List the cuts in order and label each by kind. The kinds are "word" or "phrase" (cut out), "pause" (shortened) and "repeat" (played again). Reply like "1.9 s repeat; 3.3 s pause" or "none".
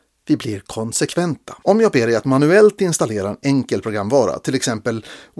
1.6 s pause